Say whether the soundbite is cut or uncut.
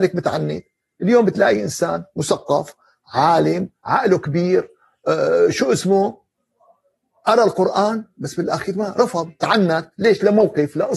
uncut